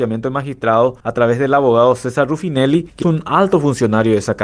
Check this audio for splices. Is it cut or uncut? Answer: cut